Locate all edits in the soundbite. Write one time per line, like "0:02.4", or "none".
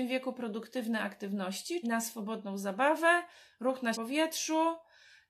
0:01.8
0:03.9